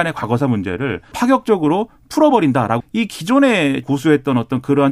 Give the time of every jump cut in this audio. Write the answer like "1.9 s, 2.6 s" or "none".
1.1 s, 2.8 s, 3.8 s

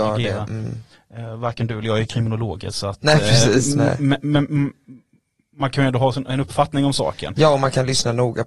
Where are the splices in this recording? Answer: none

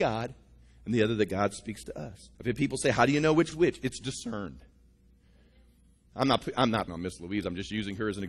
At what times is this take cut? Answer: 2.3 s, 3.5 s, 6.9 s

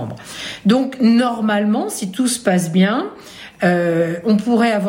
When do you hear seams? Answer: none

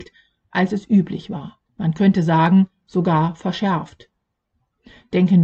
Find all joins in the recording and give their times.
1.7 s

